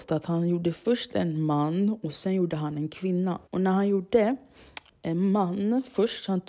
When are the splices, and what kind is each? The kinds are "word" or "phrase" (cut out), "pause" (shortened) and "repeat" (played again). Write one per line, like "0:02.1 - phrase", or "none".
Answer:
0:03.5 - pause